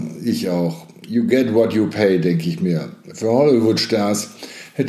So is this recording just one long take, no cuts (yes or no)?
yes